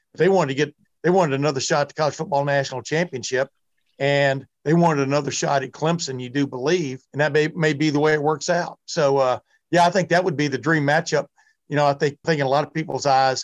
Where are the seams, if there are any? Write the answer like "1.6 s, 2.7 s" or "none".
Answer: 7.1 s, 12.2 s